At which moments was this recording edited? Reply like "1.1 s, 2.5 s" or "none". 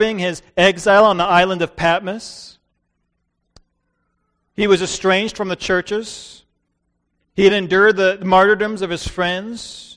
none